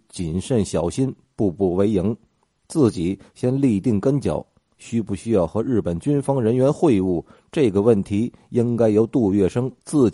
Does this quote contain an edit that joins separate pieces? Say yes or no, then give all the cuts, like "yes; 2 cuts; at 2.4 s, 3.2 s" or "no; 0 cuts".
no; 0 cuts